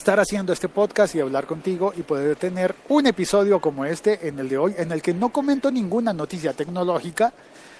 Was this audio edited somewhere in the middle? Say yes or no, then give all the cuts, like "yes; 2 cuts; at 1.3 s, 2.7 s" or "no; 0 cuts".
yes; 1 cut; at 2.8 s